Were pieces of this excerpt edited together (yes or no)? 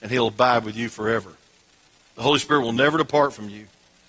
no